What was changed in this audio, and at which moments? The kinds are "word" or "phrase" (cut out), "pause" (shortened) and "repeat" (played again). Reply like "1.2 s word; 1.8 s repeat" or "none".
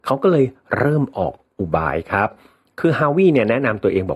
none

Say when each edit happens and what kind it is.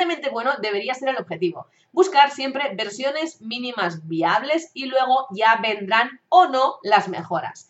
none

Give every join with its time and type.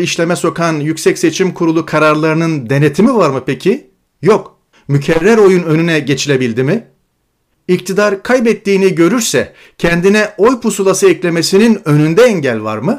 4.7 s pause

